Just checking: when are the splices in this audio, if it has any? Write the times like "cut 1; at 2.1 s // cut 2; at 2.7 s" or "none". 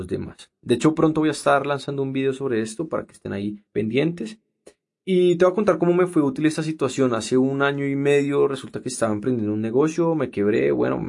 cut 1; at 3.7 s